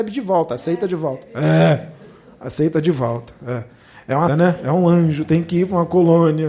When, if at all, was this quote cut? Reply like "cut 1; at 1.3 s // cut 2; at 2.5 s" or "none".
cut 1; at 4.3 s